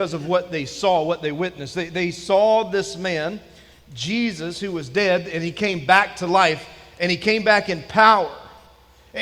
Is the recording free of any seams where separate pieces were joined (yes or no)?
yes